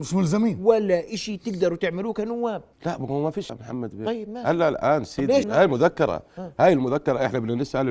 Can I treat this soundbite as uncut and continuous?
no; 3 cuts; at 2.7 s, 3.5 s, 5.4 s

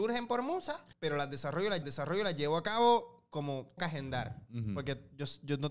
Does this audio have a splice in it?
yes; 3 cuts; at 0.9 s, 1.8 s, 3.8 s

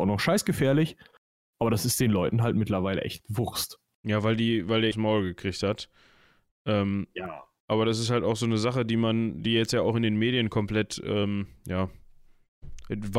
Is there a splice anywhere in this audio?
yes; 1 cut; at 4.9 s

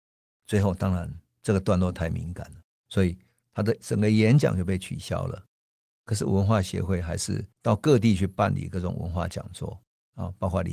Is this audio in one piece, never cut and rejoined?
no; 1 cut; at 7.5 s

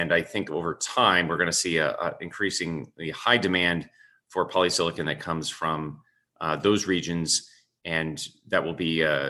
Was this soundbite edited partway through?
no; 0 cuts

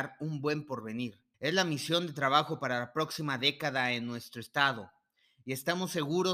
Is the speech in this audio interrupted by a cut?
yes; 1 cut; at 1.3 s

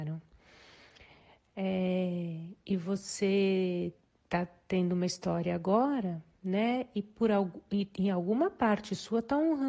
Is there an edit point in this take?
yes; 1 cut; at 4.0 s

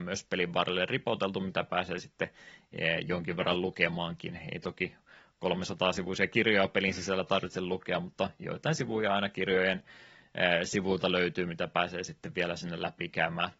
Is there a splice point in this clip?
no; 0 cuts

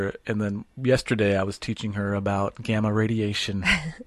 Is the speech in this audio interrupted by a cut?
no; 0 cuts

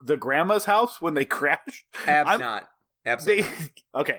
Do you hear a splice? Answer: yes; 1 cut; at 2.4 s

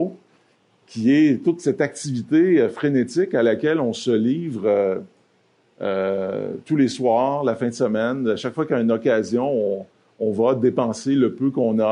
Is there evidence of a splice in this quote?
no; 0 cuts

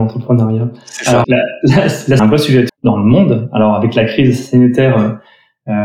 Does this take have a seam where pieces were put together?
yes; 3 cuts; at 1.2 s, 2.2 s, 2.7 s

